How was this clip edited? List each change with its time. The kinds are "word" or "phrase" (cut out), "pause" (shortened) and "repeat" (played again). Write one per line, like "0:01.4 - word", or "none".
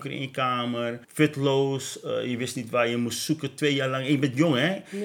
0:01.0 - pause